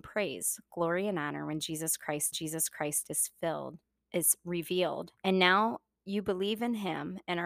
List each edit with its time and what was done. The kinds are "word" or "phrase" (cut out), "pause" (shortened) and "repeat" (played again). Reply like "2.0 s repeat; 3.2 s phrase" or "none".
2.3 s repeat; 5.2 s pause